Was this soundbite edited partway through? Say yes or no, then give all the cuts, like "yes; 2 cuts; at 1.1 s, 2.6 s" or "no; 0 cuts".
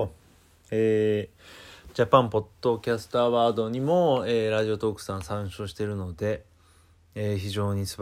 no; 0 cuts